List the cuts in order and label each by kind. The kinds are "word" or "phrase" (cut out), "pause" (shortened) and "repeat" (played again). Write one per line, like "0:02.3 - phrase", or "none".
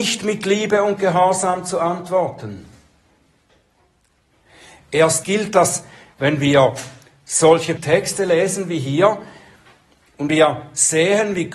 0:05.2 - word
0:07.8 - word
0:10.3 - word